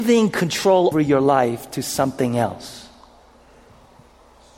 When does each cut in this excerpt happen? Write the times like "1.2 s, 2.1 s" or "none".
0.9 s